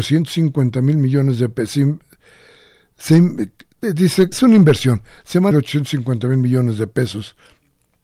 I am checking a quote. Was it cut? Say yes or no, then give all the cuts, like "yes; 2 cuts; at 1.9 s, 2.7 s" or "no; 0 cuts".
yes; 2 cuts; at 4.3 s, 5.5 s